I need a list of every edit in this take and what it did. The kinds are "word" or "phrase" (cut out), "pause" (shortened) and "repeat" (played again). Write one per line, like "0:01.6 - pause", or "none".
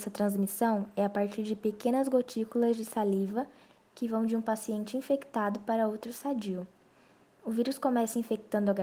none